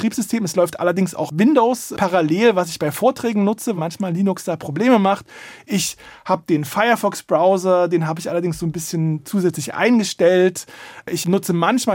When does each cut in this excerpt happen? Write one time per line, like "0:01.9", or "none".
0:03.8